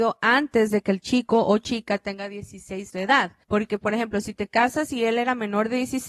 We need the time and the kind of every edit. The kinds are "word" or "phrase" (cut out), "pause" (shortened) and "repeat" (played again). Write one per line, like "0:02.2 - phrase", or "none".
0:02.9 - word
0:03.4 - pause

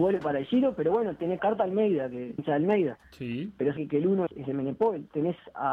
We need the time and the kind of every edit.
0:01.4 - phrase
0:02.4 - phrase
0:03.8 - word
0:04.3 - word

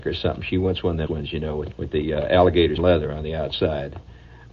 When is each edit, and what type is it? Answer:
0:01.1 - word
0:01.7 - word
0:02.8 - word

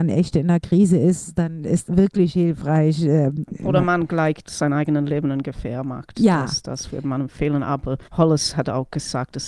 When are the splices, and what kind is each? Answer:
0:01.8 - word
0:04.4 - word
0:08.0 - pause

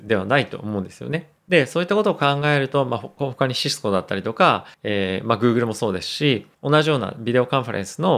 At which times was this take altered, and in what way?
0:01.4 - pause
0:04.7 - pause
0:06.5 - pause

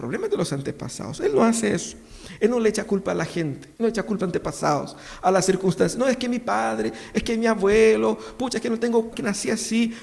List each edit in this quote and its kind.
0:03.7 - pause
0:04.2 - phrase
0:09.1 - word

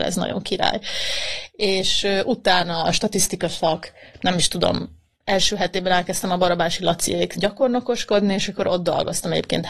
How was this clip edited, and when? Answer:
0:07.4 - word

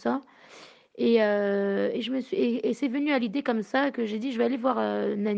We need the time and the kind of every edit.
none

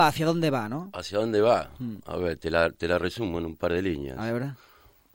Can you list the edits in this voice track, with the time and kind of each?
none

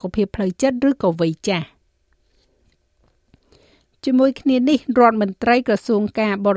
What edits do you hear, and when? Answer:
none

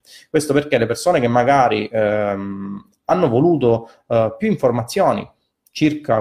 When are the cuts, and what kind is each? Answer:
none

